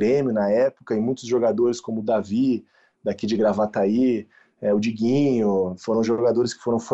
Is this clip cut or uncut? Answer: uncut